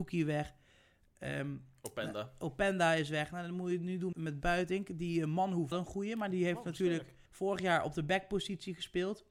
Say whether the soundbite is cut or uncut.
cut